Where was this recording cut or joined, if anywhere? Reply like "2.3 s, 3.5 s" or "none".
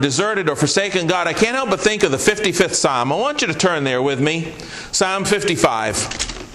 none